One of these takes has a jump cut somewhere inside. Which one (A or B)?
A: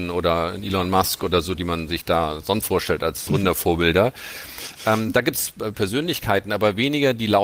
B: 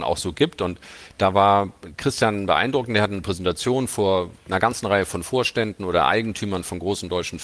A